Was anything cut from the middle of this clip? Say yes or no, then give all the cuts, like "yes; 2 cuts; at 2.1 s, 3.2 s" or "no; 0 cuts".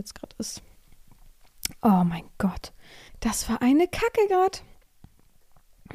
yes; 1 cut; at 3.1 s